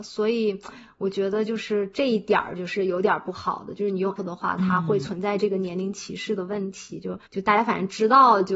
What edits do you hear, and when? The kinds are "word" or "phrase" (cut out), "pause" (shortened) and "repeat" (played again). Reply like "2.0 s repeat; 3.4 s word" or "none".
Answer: 4.2 s word; 7.3 s pause